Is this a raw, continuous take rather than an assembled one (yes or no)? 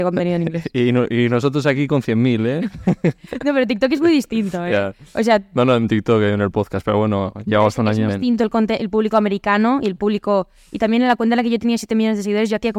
no